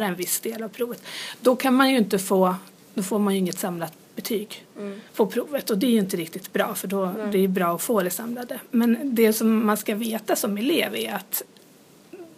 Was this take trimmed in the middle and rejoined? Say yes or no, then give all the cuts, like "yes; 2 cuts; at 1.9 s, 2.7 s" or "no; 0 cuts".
yes; 1 cut; at 5.1 s